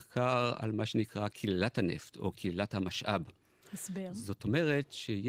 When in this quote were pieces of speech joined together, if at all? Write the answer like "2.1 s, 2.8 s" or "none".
none